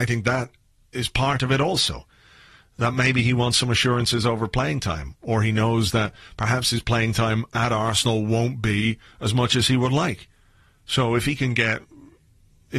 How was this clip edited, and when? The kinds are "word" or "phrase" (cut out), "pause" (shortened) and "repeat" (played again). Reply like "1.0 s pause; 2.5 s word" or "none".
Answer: none